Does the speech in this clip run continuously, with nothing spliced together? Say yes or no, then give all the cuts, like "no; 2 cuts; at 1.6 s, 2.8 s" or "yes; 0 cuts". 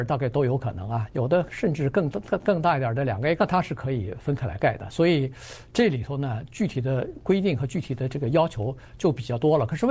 no; 1 cut; at 3.4 s